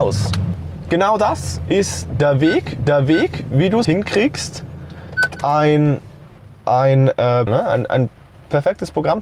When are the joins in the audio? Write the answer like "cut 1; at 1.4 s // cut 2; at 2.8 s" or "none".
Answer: cut 1; at 2.8 s // cut 2; at 3.8 s // cut 3; at 7.5 s